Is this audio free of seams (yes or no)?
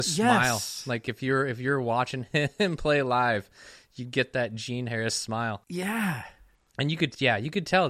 yes